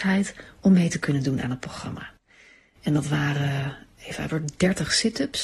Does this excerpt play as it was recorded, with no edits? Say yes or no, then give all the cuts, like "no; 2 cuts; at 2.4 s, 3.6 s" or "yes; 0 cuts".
no; 1 cut; at 4.3 s